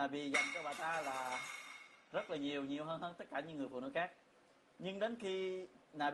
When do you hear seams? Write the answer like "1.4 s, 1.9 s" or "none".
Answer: none